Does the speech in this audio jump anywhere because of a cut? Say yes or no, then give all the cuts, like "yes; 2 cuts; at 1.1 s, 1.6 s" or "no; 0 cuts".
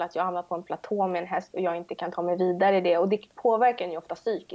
no; 0 cuts